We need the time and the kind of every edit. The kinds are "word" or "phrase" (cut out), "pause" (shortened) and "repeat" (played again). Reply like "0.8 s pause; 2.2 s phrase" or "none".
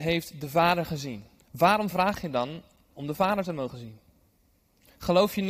1.4 s pause